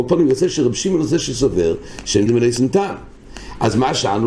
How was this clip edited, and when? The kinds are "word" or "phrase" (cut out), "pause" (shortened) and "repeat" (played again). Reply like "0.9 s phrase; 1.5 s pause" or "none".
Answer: 2.3 s word

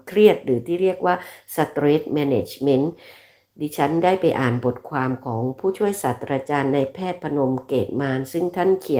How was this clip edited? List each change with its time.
none

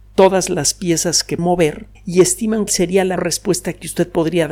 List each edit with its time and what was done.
1.4 s word; 1.9 s pause; 2.7 s word; 3.2 s word

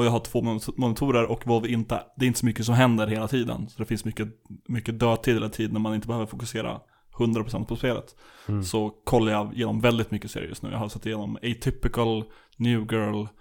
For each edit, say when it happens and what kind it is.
none

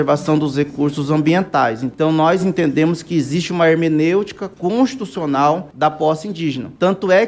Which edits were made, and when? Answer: none

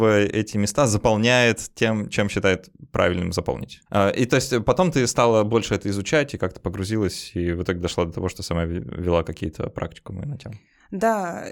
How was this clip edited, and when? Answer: 3.9 s pause

